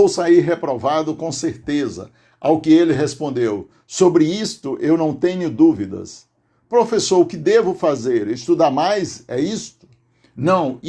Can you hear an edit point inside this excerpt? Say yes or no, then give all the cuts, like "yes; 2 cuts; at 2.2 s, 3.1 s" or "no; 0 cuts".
no; 0 cuts